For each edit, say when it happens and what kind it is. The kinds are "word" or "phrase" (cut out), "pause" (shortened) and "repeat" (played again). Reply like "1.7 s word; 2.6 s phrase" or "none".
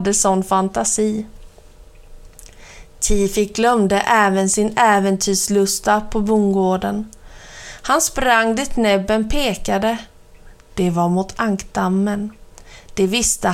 none